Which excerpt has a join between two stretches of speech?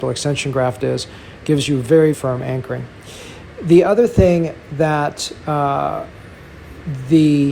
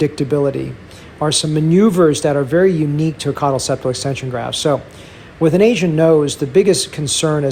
first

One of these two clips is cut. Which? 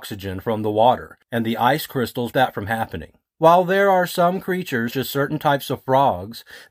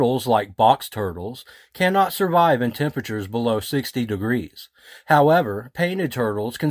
first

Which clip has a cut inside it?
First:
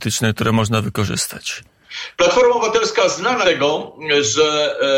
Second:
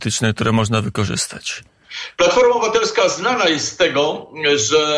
first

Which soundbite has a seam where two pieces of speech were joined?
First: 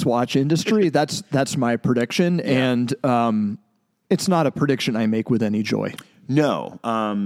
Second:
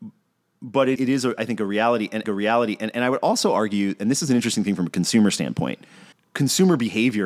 second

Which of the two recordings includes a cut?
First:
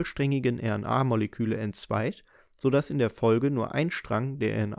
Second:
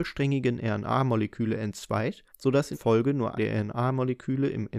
second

